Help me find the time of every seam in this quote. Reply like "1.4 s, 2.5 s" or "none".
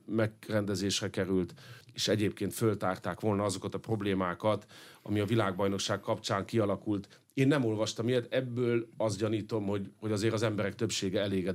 1.8 s